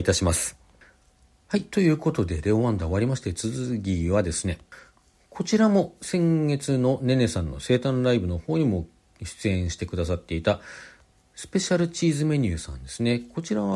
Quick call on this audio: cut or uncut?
uncut